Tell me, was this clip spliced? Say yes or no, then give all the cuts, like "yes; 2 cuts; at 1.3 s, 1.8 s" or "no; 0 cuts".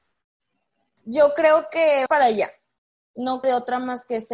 yes; 2 cuts; at 2.1 s, 3.4 s